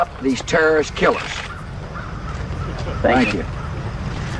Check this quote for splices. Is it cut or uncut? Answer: uncut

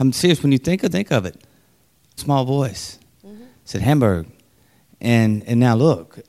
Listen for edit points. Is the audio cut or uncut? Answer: cut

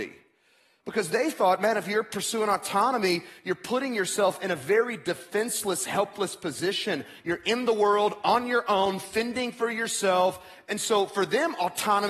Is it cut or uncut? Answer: uncut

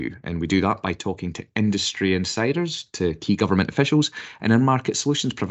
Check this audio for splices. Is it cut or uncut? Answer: uncut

